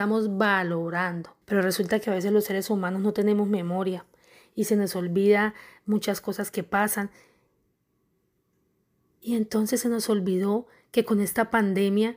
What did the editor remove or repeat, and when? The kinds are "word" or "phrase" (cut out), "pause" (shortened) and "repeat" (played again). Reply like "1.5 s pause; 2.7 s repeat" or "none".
1.4 s pause